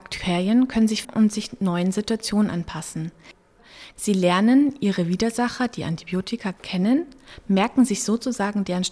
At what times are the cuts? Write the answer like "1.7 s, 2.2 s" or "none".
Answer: 1.0 s